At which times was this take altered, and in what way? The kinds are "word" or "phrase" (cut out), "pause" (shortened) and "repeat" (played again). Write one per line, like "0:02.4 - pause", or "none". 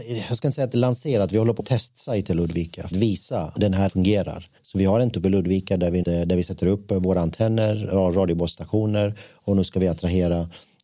0:01.6 - word
0:02.9 - phrase
0:03.5 - word
0:03.9 - word
0:04.6 - pause
0:05.1 - word
0:06.0 - word

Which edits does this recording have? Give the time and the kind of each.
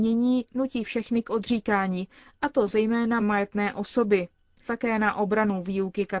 0:03.2 - word
0:04.7 - word

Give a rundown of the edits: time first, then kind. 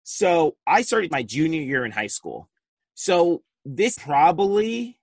0:01.1 - word
0:02.8 - pause
0:03.9 - word

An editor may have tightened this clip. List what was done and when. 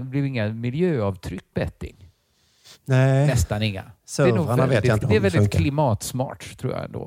0:01.5 - word
0:05.0 - word

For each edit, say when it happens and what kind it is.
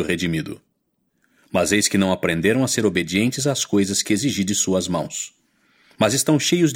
none

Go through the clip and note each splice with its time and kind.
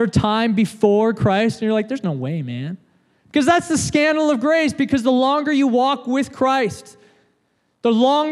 none

